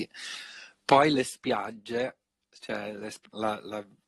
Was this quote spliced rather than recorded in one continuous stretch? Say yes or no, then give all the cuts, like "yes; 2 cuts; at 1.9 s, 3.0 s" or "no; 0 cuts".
no; 0 cuts